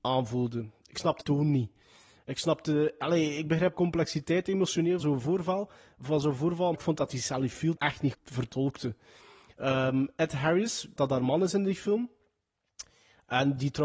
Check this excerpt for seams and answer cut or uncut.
cut